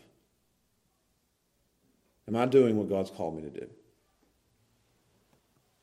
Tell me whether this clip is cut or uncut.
uncut